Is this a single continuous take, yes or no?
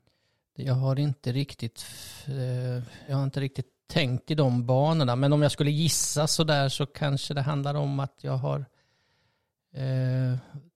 no